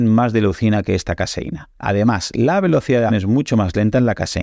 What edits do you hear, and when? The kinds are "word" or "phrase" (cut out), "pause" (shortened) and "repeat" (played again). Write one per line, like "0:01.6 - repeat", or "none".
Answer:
0:03.1 - word